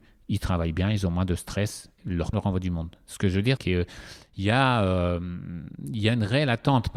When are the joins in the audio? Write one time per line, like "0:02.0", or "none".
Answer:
0:02.0
0:02.3
0:03.6